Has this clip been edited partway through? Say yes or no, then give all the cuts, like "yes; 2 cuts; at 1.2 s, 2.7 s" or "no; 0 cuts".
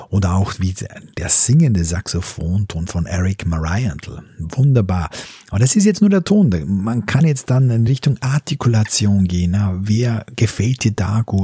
no; 0 cuts